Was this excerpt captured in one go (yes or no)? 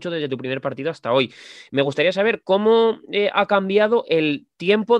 yes